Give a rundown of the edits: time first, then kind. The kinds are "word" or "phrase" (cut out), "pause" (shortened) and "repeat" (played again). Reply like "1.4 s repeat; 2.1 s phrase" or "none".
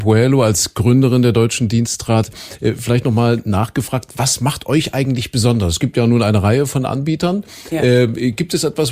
none